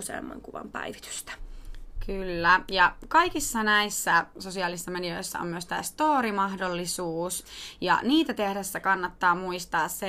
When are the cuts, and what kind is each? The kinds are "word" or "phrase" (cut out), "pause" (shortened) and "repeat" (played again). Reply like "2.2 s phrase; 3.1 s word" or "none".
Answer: none